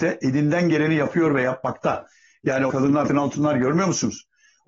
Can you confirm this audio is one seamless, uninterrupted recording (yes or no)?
no